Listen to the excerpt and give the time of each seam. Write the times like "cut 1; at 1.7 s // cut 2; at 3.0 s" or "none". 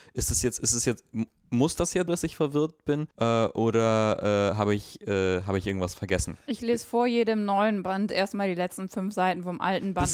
cut 1; at 2.1 s // cut 2; at 3.1 s